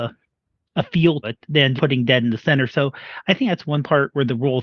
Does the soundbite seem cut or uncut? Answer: cut